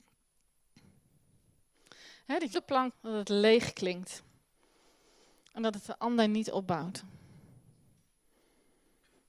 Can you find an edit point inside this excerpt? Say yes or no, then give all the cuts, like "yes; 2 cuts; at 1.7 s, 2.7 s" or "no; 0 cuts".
yes; 2 cuts; at 2.5 s, 2.9 s